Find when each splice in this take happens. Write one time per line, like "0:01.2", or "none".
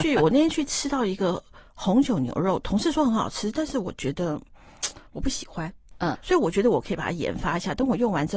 0:06.1